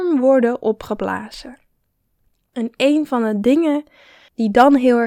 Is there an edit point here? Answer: no; 0 cuts

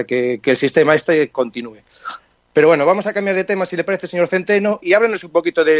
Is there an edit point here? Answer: yes; 1 cut; at 4.8 s

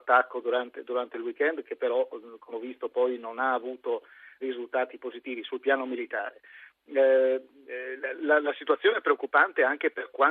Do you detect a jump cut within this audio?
yes; 3 cuts; at 2.5 s, 4.4 s, 8.1 s

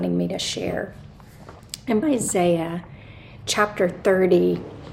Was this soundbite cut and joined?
yes; 1 cut; at 2.0 s

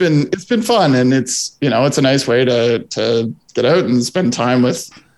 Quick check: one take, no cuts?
yes; 0 cuts

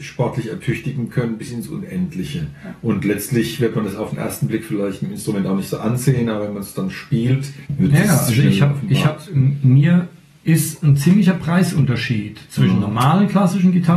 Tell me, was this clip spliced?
yes; 1 cut; at 7.7 s

